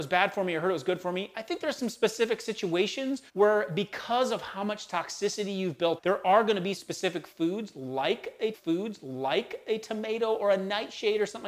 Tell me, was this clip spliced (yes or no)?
yes